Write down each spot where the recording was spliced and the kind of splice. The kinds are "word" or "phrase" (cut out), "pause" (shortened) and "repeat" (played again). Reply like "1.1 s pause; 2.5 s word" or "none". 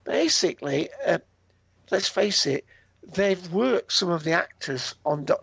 none

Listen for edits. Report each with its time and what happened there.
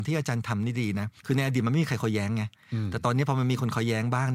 1.2 s pause

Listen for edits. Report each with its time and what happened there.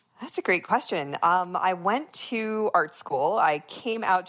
none

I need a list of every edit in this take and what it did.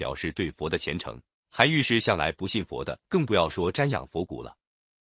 1.3 s pause; 3.0 s pause

